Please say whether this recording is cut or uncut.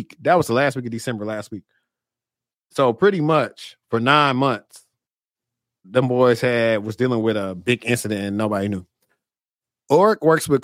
uncut